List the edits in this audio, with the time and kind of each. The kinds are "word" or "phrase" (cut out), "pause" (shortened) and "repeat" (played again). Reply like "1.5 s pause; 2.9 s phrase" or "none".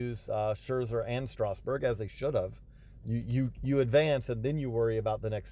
none